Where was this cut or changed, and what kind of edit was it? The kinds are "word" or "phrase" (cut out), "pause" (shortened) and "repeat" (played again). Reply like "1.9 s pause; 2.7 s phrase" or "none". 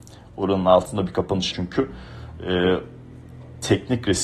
1.5 s word